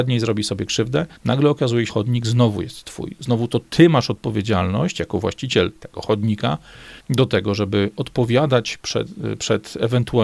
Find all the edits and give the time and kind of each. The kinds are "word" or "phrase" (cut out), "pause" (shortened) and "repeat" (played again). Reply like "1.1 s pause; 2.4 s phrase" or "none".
1.2 s pause; 1.9 s phrase; 7.0 s pause